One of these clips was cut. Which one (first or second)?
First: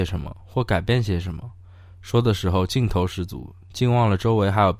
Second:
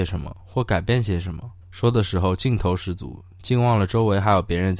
second